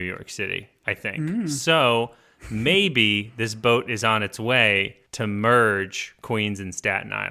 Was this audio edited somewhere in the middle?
yes; 1 cut; at 5.1 s

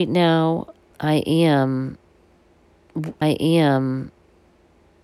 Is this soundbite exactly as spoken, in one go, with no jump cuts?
no; 2 cuts; at 0.9 s, 3.2 s

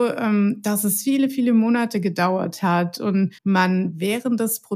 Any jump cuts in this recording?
yes; 1 cut; at 3.4 s

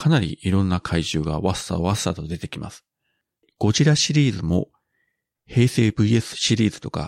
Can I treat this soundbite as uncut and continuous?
yes; 0 cuts

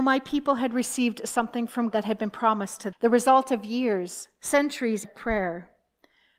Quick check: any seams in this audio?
yes; 3 cuts; at 1.9 s, 2.9 s, 5.0 s

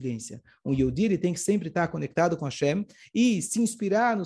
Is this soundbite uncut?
yes; 0 cuts

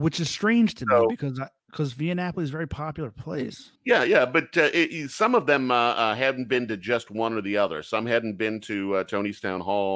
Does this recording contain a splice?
yes; 1 cut; at 3.8 s

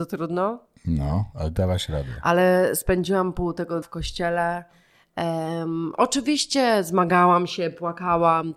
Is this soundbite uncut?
no; 1 cut; at 3.8 s

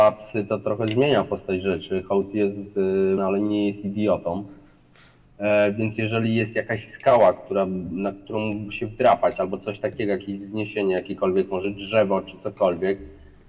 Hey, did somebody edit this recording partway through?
yes; 1 cut; at 3.2 s

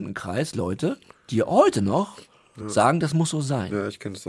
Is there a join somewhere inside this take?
no; 0 cuts

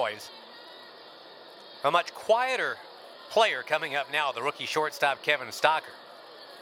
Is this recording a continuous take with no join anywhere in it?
yes; 0 cuts

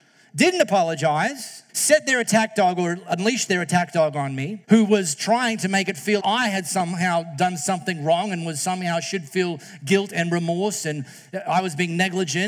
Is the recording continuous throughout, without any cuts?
no; 3 cuts; at 1.7 s, 4.6 s, 6.2 s

